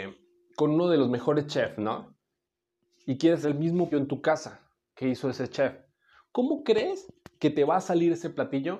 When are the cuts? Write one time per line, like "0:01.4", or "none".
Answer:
0:03.4
0:03.9